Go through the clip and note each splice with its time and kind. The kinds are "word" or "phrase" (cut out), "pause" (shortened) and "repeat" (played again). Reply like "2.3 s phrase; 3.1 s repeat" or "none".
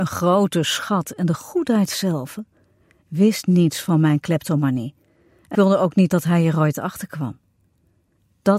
5.5 s word